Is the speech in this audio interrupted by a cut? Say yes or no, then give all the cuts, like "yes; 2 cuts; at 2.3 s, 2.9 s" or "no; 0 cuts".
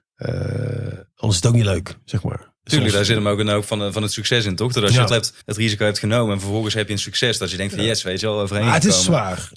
yes; 2 cuts; at 5.1 s, 5.4 s